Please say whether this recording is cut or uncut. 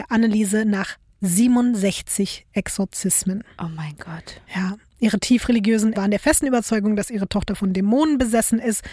cut